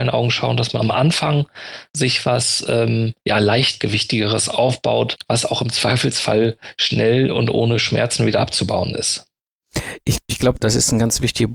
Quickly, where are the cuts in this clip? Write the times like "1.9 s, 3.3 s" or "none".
1.9 s, 3.2 s